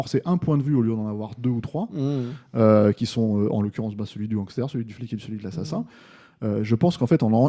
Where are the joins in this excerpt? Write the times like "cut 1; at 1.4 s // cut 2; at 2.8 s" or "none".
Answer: none